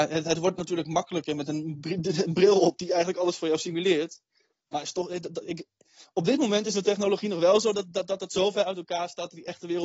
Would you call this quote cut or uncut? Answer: uncut